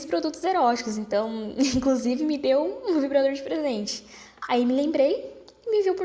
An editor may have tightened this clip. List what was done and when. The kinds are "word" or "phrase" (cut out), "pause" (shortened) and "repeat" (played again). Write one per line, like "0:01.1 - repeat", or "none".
none

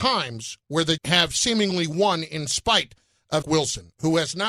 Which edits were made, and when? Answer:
0:01.0 - word
0:03.4 - word

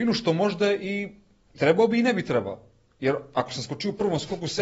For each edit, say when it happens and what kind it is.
0:01.5 - word

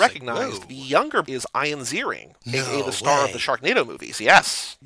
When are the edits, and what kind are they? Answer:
0:01.2 - word
0:02.4 - pause

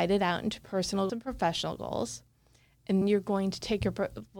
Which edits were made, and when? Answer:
0:01.1 - word
0:03.0 - word

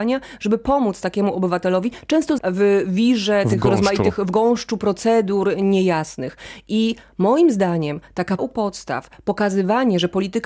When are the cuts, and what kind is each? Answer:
0:02.4 - word
0:08.4 - word

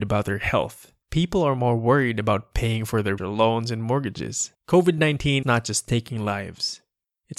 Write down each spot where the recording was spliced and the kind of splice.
0:01.0 - pause
0:03.2 - word
0:04.6 - pause
0:05.4 - word

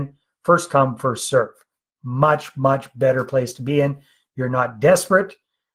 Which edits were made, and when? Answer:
none

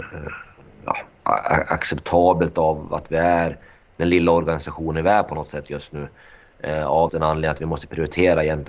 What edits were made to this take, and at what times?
0:07.1 - word

